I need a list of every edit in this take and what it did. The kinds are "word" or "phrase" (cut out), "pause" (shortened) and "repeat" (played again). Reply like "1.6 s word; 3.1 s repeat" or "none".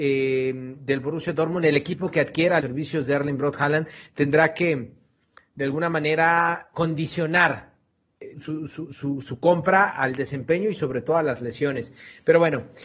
2.6 s word; 6.7 s word; 8.3 s word; 9.9 s word